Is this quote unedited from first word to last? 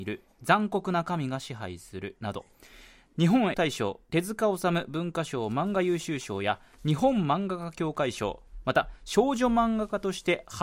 no; 1 cut; at 3.5 s

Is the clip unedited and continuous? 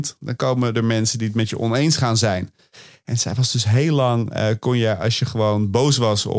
yes; 0 cuts

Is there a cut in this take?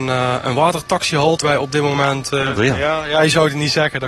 yes; 2 cuts; at 1.4 s, 2.6 s

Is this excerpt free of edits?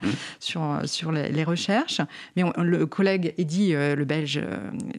yes; 0 cuts

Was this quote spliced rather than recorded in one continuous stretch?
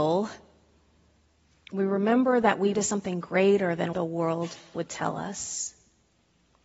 yes; 2 cuts; at 2.7 s, 3.9 s

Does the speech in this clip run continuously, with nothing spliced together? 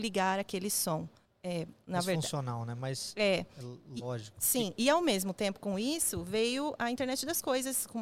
no; 1 cut; at 1.2 s

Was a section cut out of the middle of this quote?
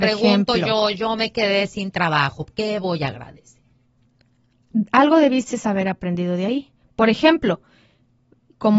no; 0 cuts

